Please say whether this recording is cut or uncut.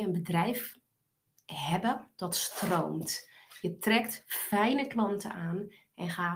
uncut